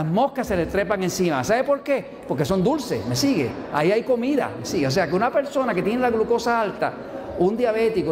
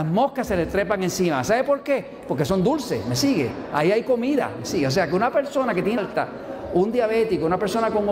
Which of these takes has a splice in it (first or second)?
second